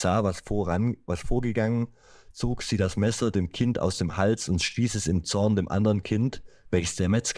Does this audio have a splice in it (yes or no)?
no